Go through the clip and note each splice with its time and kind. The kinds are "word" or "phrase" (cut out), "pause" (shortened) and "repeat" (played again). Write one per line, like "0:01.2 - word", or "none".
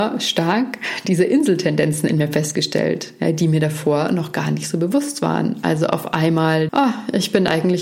0:06.7 - word